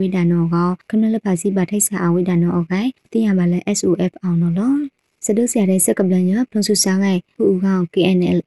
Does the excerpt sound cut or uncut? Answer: uncut